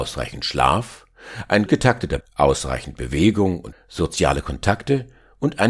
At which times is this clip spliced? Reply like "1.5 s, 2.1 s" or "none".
1.7 s, 2.2 s, 3.7 s